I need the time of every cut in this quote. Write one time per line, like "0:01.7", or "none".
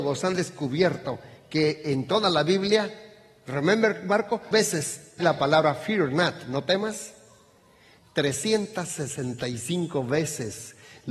0:04.5
0:05.2